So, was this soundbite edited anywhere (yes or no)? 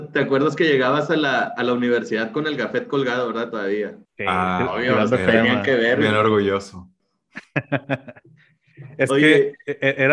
yes